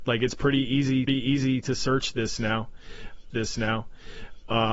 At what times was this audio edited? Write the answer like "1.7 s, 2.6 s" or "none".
1.1 s, 3.3 s